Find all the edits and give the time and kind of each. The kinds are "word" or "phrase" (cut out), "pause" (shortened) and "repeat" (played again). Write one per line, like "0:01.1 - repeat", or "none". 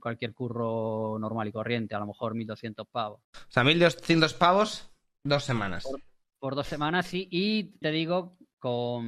0:07.8 - word